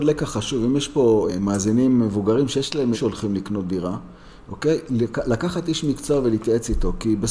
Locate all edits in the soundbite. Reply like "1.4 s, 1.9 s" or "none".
1.3 s, 2.9 s